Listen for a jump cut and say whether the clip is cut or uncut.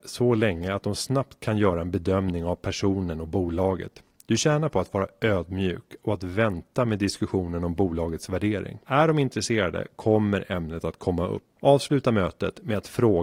cut